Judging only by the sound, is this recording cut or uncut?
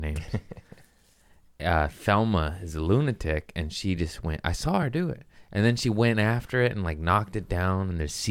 uncut